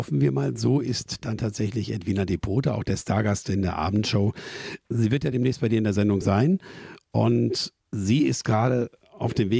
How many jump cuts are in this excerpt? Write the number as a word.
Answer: zero